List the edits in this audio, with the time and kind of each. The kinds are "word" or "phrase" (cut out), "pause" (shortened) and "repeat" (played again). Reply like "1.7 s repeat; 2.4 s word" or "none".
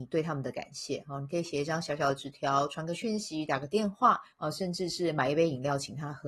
4.3 s pause